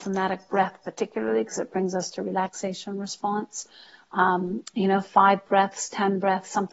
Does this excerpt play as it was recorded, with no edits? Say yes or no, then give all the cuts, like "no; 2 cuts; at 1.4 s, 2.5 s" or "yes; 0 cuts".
yes; 0 cuts